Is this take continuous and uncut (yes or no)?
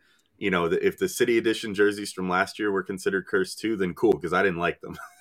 yes